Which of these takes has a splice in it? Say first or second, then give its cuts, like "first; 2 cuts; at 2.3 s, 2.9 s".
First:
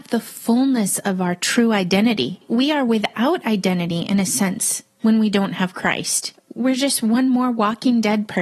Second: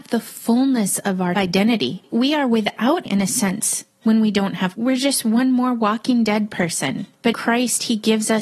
second; 4 cuts; at 1.4 s, 3.1 s, 4.8 s, 7.3 s